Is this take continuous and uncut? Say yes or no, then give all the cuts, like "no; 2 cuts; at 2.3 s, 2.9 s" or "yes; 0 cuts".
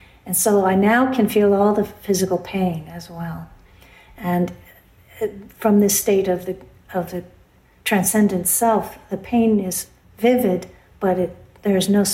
yes; 0 cuts